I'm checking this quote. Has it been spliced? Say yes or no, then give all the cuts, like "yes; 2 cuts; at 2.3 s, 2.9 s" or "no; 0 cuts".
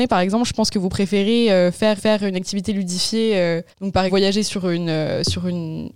yes; 3 cuts; at 2.0 s, 3.7 s, 4.1 s